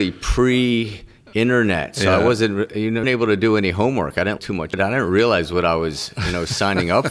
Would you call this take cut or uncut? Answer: cut